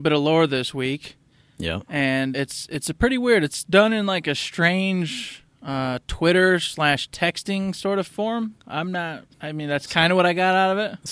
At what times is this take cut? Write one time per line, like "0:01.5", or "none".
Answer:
0:02.3
0:09.3